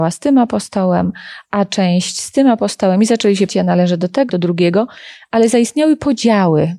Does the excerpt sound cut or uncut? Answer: cut